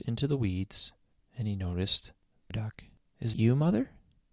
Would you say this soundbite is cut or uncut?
cut